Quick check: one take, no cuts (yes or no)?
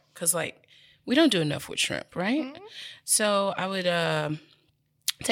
yes